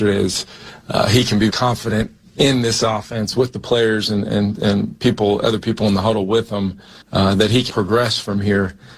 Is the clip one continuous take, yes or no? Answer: no